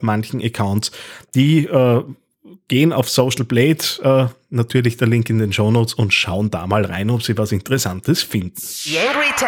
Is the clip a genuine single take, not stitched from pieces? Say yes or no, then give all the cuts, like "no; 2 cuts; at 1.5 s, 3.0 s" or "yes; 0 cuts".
yes; 0 cuts